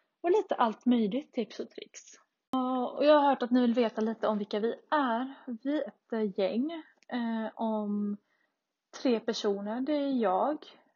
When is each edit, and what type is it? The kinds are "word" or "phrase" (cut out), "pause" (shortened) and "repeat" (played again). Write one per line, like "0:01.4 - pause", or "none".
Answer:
0:05.9 - word